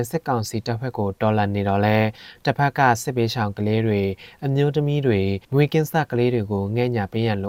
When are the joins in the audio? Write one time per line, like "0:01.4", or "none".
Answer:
0:05.4

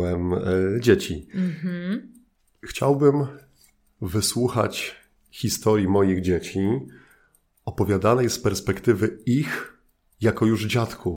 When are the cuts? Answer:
0:02.3

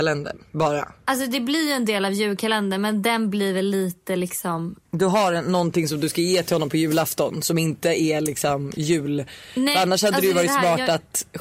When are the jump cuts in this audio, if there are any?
0:01.0

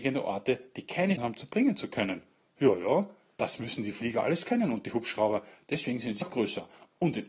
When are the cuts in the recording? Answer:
0:01.2
0:06.2

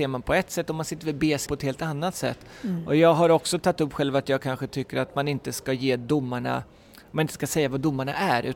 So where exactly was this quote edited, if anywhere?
0:01.5

